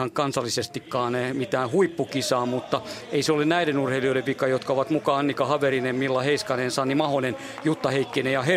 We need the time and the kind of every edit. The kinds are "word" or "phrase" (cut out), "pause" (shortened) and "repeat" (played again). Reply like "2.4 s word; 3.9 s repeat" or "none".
none